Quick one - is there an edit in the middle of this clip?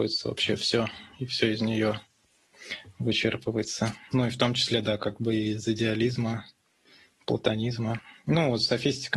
no; 0 cuts

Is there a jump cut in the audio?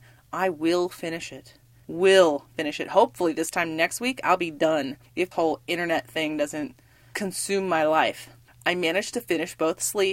yes; 1 cut; at 5.3 s

